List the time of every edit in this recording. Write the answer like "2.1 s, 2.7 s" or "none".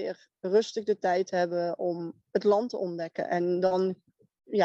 2.2 s